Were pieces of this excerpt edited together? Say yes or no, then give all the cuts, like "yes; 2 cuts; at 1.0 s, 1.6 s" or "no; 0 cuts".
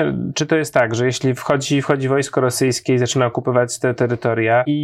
no; 0 cuts